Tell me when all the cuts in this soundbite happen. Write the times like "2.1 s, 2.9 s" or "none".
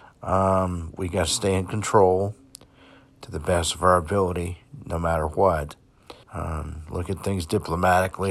6.2 s